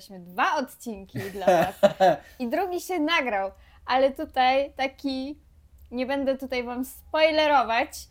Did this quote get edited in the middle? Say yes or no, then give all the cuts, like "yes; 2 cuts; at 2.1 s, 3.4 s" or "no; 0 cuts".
no; 0 cuts